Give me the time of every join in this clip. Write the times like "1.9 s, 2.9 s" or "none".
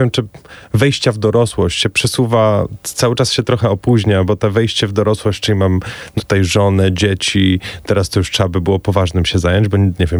6.2 s